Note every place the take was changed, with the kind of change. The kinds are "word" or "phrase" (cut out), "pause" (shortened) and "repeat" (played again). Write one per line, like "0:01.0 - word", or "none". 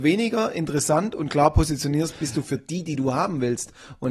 none